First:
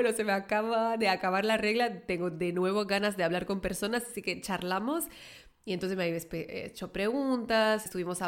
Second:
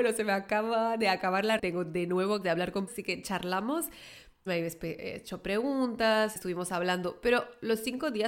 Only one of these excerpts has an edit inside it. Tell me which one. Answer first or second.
second